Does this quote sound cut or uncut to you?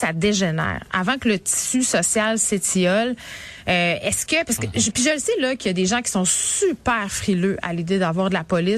uncut